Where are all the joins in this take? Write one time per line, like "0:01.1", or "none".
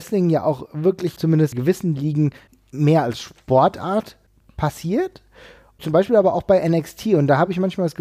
0:01.2
0:01.5